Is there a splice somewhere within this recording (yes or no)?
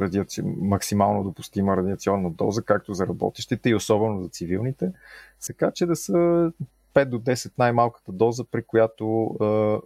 yes